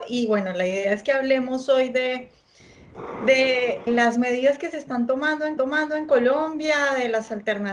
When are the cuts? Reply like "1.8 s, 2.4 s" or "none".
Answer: 3.9 s, 5.6 s